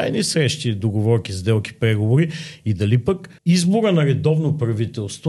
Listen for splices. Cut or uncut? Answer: cut